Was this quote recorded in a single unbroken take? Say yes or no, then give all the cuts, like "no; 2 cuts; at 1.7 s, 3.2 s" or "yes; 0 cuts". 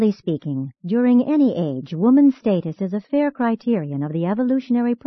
yes; 0 cuts